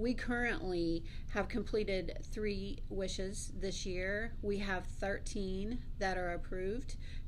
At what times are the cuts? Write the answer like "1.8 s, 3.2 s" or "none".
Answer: none